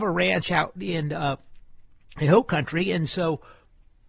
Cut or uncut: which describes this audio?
uncut